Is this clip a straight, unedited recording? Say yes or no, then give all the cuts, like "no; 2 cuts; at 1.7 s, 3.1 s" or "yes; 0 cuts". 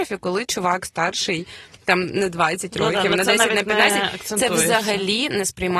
yes; 0 cuts